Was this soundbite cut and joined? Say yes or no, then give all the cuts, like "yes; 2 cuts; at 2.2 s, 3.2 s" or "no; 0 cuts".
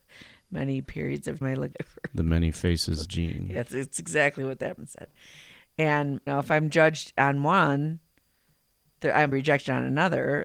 yes; 6 cuts; at 1.4 s, 1.7 s, 3.0 s, 4.8 s, 6.3 s, 9.3 s